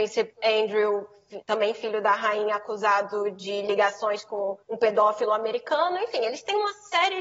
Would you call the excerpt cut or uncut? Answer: cut